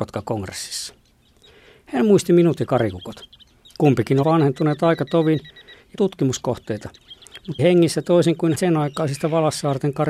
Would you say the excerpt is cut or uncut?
cut